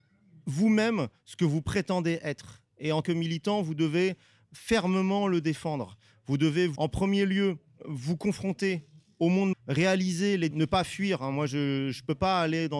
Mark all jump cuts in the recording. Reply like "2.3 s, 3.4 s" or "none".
3.0 s, 9.5 s, 10.5 s

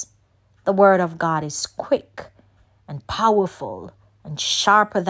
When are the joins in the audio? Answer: none

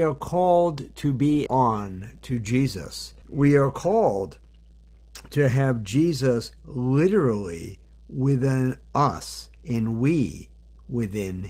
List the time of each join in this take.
1.5 s, 3.2 s

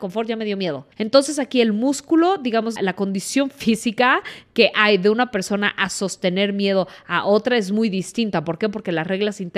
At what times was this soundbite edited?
0.9 s, 2.8 s

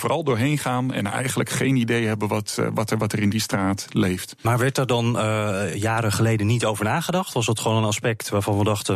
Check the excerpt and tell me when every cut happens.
none

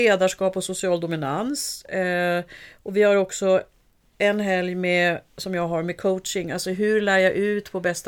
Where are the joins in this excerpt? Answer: none

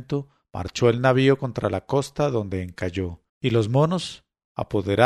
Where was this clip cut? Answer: 3.3 s

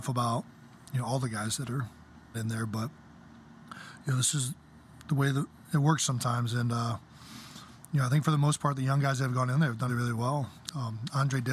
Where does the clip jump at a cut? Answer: 2.3 s, 9.9 s

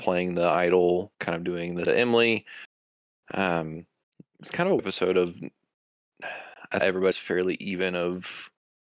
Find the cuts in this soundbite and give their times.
1.1 s, 1.9 s, 4.0 s, 4.8 s, 6.8 s, 7.1 s

